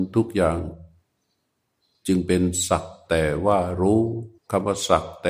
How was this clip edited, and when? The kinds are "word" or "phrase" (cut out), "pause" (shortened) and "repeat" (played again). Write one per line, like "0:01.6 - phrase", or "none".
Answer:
0:04.4 - pause